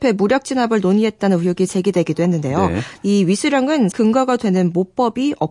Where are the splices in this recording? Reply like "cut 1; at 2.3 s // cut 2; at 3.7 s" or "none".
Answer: cut 1; at 3.9 s